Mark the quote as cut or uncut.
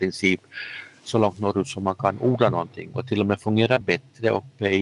uncut